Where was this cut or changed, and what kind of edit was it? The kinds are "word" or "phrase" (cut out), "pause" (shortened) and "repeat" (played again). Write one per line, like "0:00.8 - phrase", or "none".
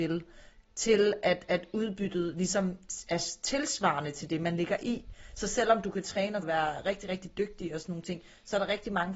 0:06.4 - phrase